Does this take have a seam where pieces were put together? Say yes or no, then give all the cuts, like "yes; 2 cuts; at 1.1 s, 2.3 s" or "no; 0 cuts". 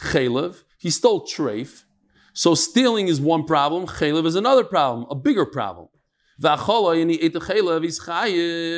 no; 0 cuts